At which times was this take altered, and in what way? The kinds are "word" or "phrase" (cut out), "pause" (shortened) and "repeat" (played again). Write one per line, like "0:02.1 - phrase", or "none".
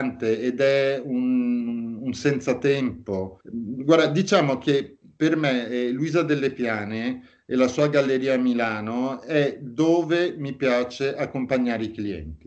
0:03.4 - pause